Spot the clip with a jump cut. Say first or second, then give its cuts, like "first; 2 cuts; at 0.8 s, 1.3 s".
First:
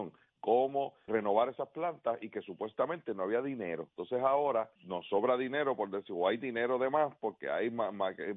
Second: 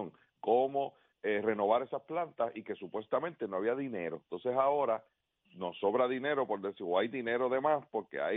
first; 2 cuts; at 1.1 s, 4.8 s